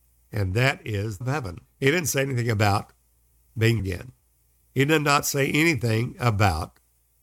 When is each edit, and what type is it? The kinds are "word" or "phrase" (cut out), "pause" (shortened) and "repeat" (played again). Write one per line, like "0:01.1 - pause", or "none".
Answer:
0:01.2 - phrase
0:01.6 - pause
0:03.8 - word